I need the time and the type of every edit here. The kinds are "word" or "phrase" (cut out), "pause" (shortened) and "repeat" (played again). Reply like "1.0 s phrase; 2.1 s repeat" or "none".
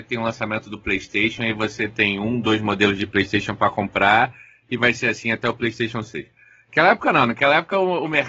none